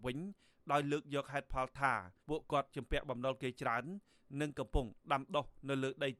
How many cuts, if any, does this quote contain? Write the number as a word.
one